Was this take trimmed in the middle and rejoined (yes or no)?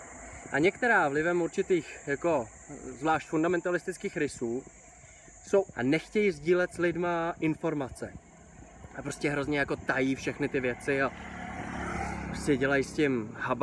yes